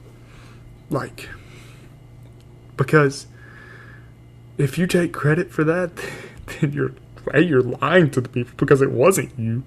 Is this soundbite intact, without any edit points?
yes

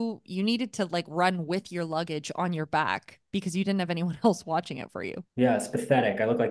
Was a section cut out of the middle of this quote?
yes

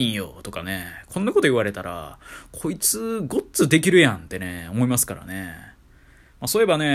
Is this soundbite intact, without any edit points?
yes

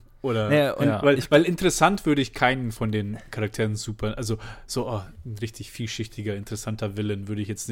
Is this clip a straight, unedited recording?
yes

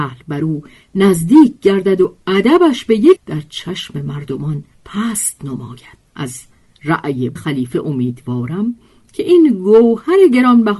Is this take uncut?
no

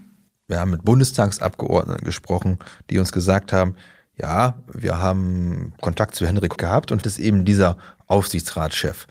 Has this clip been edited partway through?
yes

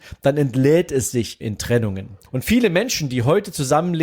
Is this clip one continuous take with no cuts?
no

